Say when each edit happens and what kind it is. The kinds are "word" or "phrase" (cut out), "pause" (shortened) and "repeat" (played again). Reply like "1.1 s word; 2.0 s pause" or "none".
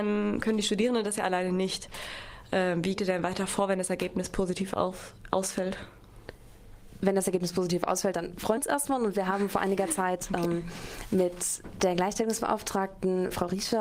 3.0 s word; 8.6 s word; 9.5 s word